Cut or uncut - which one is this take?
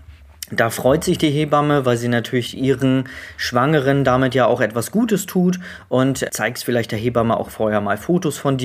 cut